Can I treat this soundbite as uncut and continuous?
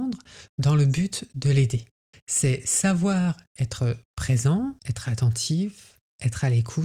no; 2 cuts; at 2.1 s, 4.8 s

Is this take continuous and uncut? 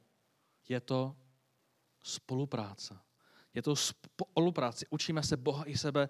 yes; 0 cuts

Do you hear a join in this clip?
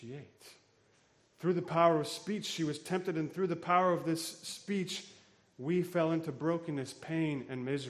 no; 0 cuts

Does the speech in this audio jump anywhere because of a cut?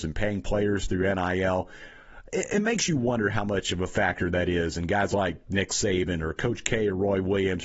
no; 0 cuts

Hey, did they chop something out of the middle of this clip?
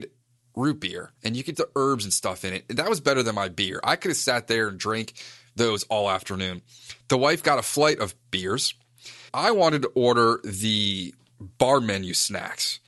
yes; 3 cuts; at 1.2 s, 1.5 s, 9.3 s

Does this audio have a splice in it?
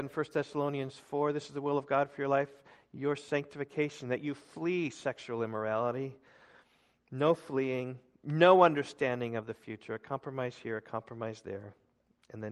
no; 0 cuts

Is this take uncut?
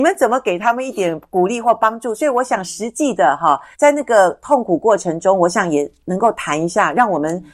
no; 1 cut; at 3.7 s

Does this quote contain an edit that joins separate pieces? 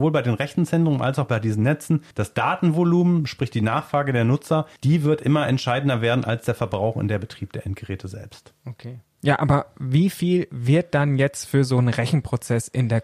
yes; 2 cuts; at 2.1 s, 4.8 s

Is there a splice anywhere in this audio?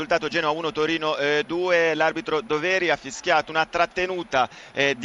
no; 0 cuts

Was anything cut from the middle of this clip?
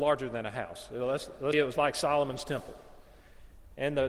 yes; 1 cut; at 1.5 s

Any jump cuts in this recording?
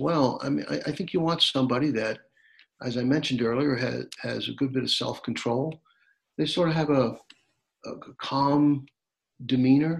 no; 0 cuts

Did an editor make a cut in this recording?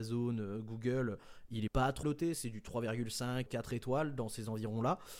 yes; 3 cuts; at 1.7 s, 2.0 s, 3.5 s

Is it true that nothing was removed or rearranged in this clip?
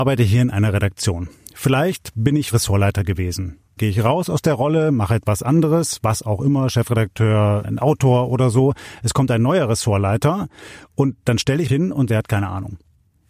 no; 5 cuts; at 2.5 s, 3.8 s, 7.6 s, 11.7 s, 12.1 s

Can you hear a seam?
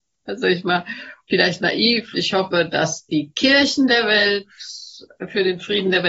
yes; 1 cut; at 2.1 s

